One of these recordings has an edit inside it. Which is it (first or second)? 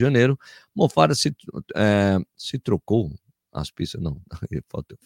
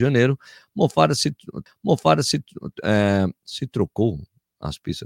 second